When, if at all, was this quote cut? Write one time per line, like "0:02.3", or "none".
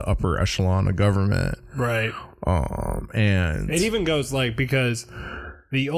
none